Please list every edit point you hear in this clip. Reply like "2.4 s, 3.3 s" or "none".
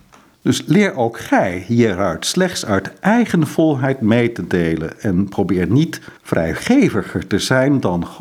6.2 s